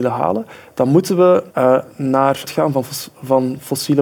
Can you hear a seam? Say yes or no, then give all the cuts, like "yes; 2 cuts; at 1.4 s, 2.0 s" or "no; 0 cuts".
yes; 2 cuts; at 1.5 s, 2.5 s